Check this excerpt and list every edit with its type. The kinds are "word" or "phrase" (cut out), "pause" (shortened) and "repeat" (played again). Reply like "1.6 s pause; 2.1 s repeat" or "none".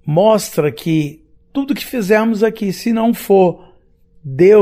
none

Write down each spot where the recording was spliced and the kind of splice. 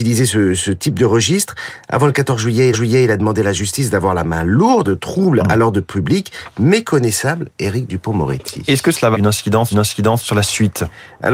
2.7 s repeat; 4.8 s phrase; 9.1 s word; 9.7 s repeat

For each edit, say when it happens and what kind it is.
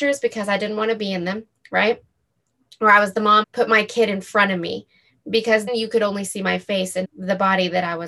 3.4 s word; 5.7 s word; 7.0 s word

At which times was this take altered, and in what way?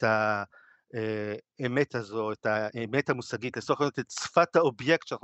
none

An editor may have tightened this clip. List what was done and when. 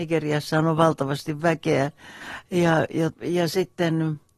3.1 s word

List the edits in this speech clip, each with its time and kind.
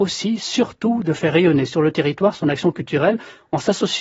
none

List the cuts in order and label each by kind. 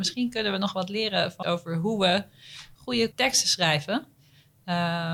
1.4 s word; 3.1 s word

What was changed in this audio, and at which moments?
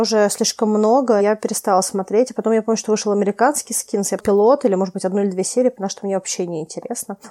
1.2 s word; 4.2 s word

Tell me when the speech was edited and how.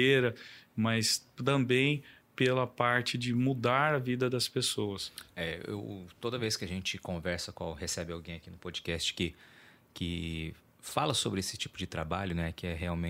none

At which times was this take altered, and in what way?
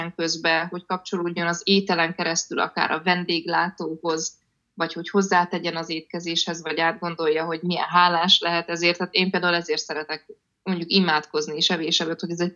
none

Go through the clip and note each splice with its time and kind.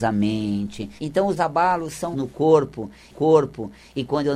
1.0 s pause; 1.4 s word; 2.1 s word; 3.1 s repeat

